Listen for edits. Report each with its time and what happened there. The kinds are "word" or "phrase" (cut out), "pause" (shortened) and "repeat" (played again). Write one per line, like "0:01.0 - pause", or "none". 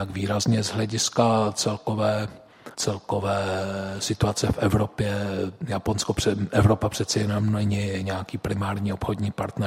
0:02.7 - pause

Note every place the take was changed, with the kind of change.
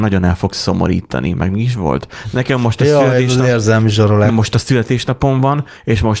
0:04.3 - word

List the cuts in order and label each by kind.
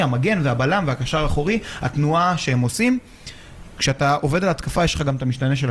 none

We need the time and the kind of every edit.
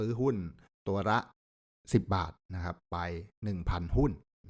0:01.6 - pause

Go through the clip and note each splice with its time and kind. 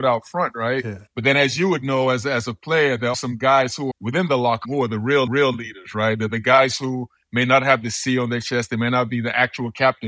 0:01.1 - pause
0:03.1 - word
0:03.9 - word
0:04.6 - word
0:05.3 - repeat

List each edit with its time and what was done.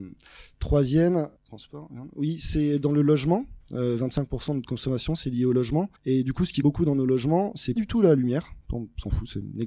0:01.4 - pause
0:06.0 - pause
0:06.6 - word
0:07.8 - word

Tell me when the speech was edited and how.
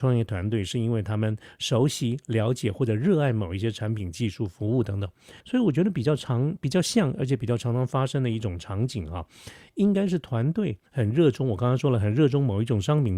0:05.4 - pause
0:10.9 - pause

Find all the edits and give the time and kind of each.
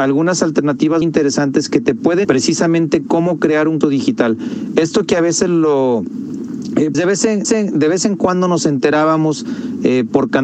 0:01.0 - word
0:02.2 - phrase
0:03.8 - word
0:06.9 - word
0:07.4 - repeat

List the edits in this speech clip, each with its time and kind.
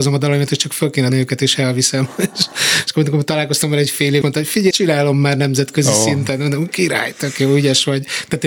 0:01.1 - word
0:04.2 - word
0:04.7 - word

